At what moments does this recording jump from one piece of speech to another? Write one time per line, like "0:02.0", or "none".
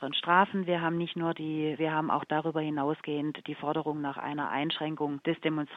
0:01.8